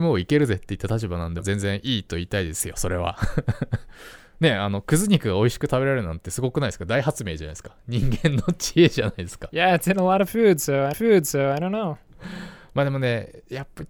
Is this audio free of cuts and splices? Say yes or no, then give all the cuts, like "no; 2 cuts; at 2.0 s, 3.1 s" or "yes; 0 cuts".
no; 1 cut; at 10.9 s